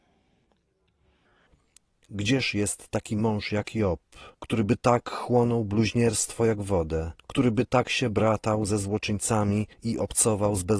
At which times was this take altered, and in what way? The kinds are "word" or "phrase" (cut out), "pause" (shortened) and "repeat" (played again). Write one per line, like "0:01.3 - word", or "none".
0:04.3 - pause
0:07.2 - pause
0:09.7 - pause